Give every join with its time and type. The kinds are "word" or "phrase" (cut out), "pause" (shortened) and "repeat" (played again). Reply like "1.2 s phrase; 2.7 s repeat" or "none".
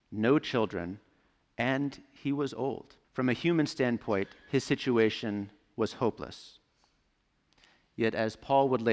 3.0 s pause